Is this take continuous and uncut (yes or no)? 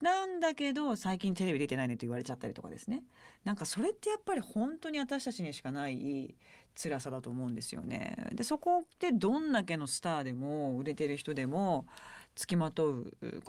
yes